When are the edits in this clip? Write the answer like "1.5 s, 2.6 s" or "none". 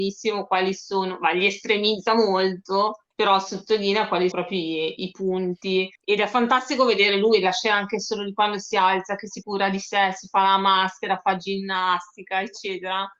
3.1 s, 4.3 s, 6.0 s, 9.4 s